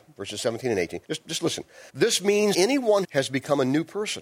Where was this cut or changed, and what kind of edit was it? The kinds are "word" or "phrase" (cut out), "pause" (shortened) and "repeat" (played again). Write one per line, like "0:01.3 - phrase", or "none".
0:01.0 - pause
0:01.9 - pause
0:02.5 - word
0:03.0 - phrase